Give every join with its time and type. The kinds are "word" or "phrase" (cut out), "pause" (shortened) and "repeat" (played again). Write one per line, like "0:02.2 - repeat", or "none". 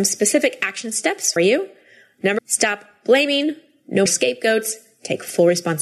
0:01.4 - word
0:02.4 - word
0:04.1 - word